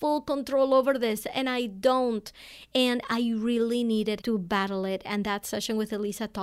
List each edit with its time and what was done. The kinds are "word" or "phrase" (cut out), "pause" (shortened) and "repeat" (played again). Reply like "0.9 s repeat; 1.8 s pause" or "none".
4.2 s word